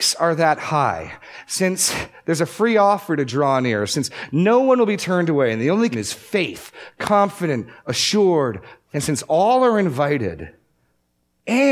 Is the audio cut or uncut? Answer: cut